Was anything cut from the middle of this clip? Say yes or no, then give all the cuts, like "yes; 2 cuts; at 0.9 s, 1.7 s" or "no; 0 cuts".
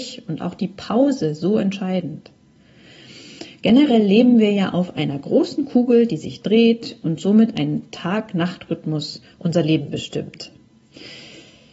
no; 0 cuts